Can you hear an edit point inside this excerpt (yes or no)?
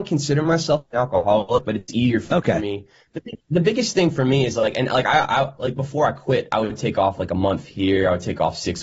no